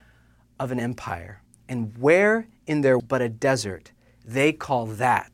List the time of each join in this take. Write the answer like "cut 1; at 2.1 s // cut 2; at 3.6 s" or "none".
cut 1; at 1.5 s // cut 2; at 3.0 s